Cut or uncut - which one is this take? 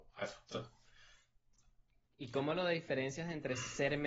uncut